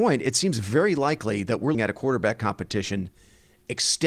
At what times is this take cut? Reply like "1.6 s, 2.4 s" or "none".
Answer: 1.7 s